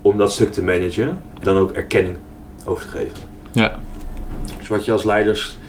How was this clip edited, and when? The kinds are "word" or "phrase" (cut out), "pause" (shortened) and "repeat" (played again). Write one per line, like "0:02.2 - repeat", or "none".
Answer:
0:01.4 - word